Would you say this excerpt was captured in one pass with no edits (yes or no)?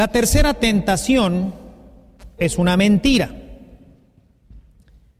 no